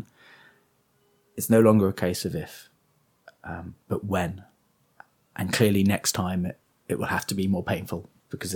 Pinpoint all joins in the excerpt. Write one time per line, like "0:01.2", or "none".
none